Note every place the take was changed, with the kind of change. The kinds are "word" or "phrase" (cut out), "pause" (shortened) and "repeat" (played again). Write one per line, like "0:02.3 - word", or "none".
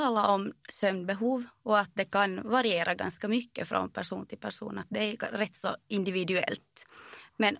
none